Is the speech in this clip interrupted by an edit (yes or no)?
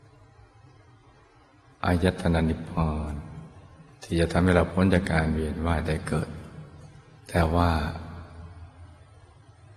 yes